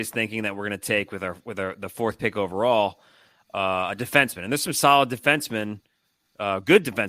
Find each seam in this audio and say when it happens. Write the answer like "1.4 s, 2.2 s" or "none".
none